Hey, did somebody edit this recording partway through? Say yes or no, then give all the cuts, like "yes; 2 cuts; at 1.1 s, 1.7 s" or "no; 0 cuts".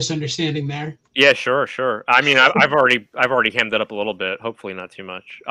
no; 0 cuts